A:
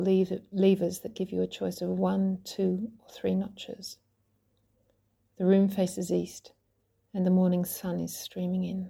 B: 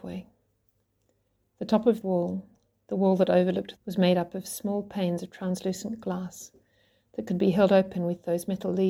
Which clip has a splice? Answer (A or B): B